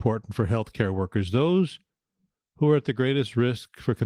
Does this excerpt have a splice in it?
no; 0 cuts

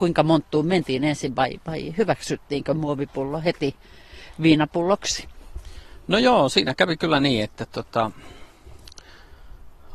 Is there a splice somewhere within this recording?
no; 0 cuts

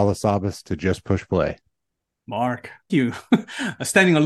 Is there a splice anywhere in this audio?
yes; 1 cut; at 2.9 s

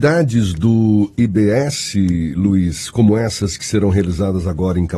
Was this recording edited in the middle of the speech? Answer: no; 0 cuts

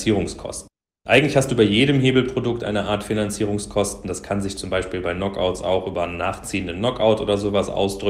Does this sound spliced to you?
no; 0 cuts

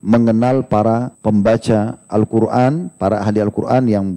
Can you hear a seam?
yes; 1 cut; at 1.1 s

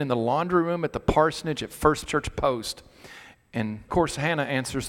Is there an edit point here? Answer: yes; 2 cuts; at 2.1 s, 3.9 s

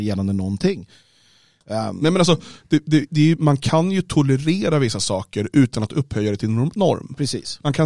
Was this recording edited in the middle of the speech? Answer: no; 0 cuts

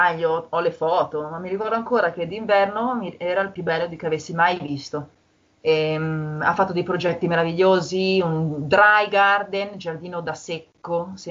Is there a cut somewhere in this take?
no; 0 cuts

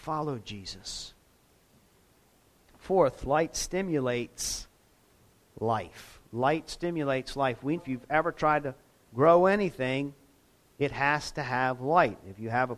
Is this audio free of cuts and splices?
no; 1 cut; at 7.8 s

